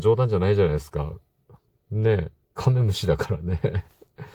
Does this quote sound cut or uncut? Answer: uncut